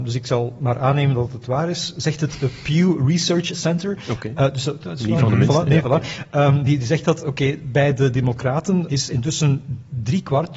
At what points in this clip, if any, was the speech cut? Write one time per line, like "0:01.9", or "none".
none